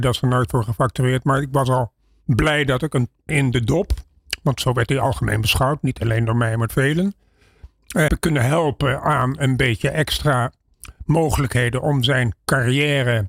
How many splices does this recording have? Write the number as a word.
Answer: three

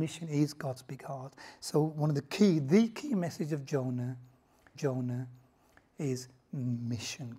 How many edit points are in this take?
one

